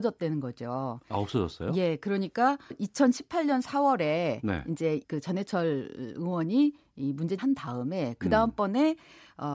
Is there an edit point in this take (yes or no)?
yes